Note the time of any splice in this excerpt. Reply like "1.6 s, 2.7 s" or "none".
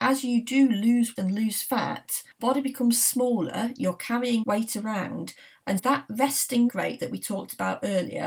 1.2 s, 2.4 s, 4.4 s, 5.8 s, 6.7 s